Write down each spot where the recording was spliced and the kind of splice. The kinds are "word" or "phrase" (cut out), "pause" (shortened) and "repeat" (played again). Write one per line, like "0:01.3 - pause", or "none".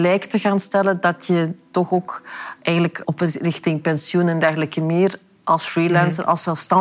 0:03.0 - word